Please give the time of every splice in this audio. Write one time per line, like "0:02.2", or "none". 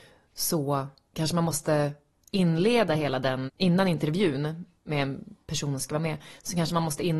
0:03.5